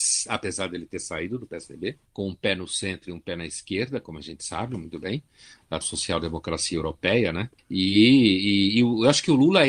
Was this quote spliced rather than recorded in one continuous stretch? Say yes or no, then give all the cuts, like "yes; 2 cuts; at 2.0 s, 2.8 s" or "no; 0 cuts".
yes; 1 cut; at 5.8 s